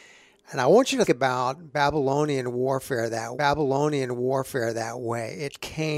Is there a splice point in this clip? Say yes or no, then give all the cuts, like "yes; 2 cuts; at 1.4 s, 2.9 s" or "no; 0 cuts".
yes; 2 cuts; at 1.0 s, 3.3 s